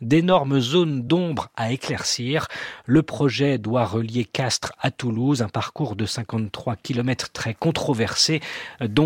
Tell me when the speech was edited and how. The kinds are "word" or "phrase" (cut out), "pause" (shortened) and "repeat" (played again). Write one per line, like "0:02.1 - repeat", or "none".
none